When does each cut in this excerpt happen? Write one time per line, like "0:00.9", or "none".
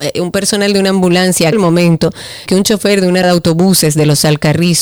0:01.5
0:02.5
0:03.2